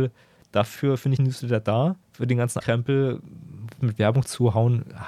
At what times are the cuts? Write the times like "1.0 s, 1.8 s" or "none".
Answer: 1.2 s, 2.0 s, 2.6 s, 3.8 s